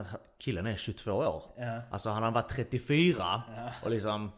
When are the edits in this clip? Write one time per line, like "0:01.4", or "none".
none